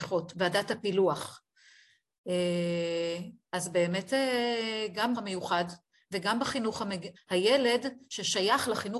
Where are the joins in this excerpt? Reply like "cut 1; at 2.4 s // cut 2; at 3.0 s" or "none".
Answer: cut 1; at 5.1 s // cut 2; at 7.2 s